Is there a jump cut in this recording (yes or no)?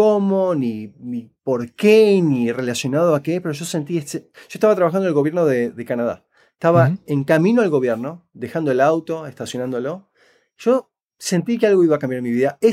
no